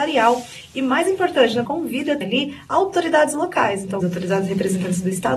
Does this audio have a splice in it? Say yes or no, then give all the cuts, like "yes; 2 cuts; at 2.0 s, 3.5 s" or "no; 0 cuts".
yes; 3 cuts; at 1.6 s, 2.2 s, 4.0 s